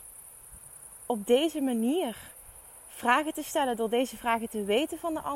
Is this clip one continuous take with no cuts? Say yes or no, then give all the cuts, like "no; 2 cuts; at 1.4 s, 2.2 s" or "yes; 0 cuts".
yes; 0 cuts